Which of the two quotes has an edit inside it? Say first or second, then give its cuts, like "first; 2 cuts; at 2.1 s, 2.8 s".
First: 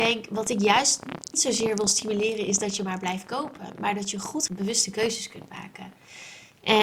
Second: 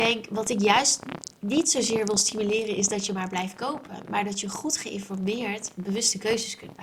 first; 2 cuts; at 1.3 s, 4.5 s